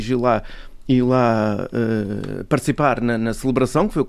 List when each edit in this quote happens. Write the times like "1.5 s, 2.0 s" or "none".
none

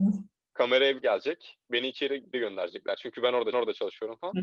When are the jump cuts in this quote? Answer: 1.0 s, 2.3 s, 3.5 s

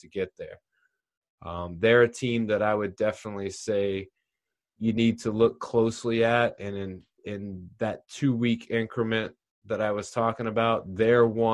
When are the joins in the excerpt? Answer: none

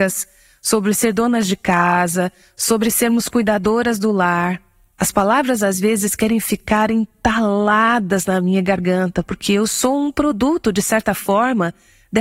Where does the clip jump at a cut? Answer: none

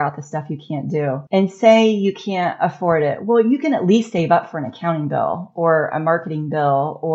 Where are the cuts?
1.3 s

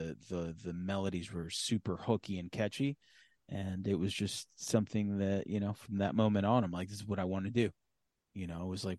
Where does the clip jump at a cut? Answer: none

